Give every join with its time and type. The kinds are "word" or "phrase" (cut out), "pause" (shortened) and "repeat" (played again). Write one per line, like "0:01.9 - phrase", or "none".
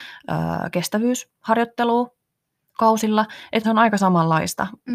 0:03.6 - word